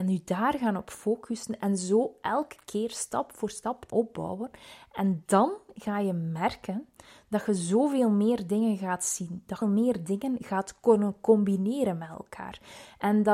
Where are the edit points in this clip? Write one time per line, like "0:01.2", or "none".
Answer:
0:03.9
0:09.6